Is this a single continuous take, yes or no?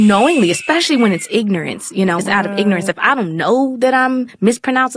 no